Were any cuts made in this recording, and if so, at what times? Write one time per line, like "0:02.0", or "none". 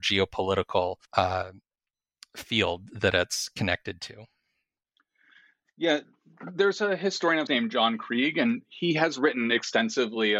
0:01.0
0:07.5